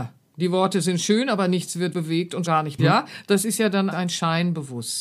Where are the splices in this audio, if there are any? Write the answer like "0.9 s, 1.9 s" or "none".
1.9 s, 2.5 s, 2.8 s, 3.9 s

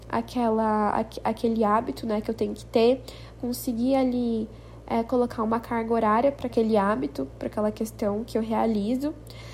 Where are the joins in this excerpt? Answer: 6.5 s

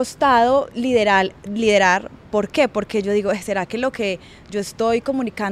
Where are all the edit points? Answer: none

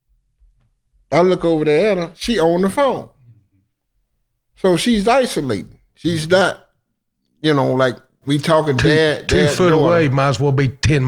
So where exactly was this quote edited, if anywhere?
none

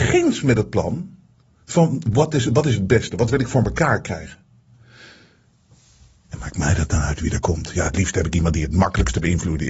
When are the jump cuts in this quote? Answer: none

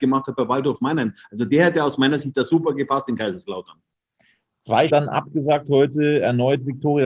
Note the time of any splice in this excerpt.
4.9 s

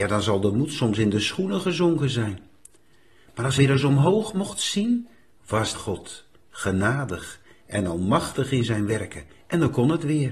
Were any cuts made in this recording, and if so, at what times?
3.6 s, 5.7 s

